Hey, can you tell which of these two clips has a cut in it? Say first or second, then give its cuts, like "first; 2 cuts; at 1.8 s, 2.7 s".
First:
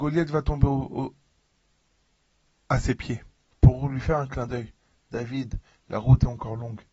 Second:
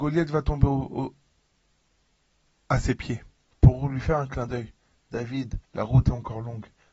second; 1 cut; at 5.6 s